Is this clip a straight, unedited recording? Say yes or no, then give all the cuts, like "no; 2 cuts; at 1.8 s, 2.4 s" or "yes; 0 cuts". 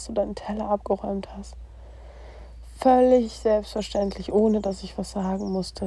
yes; 0 cuts